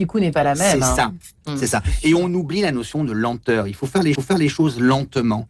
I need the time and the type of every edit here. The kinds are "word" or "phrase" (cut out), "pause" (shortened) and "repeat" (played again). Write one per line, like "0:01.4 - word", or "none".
0:01.4 - pause
0:04.2 - repeat